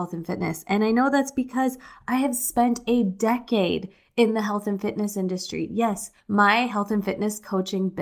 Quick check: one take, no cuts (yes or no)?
no